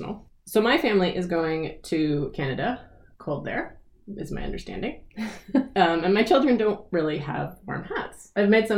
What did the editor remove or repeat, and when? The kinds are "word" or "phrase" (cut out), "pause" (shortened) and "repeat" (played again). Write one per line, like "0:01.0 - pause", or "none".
0:03.1 - word